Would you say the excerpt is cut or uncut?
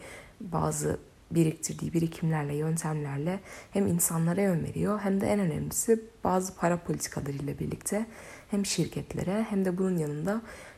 uncut